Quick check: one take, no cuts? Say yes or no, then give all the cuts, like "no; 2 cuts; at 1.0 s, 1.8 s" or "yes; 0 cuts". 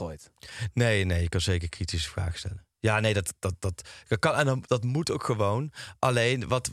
yes; 0 cuts